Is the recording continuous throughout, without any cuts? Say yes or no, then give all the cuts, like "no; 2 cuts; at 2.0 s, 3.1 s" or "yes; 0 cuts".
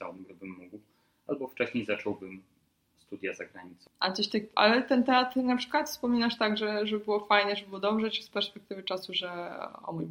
yes; 0 cuts